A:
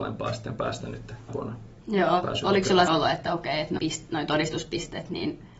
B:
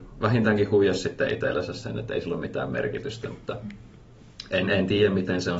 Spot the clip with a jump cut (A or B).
A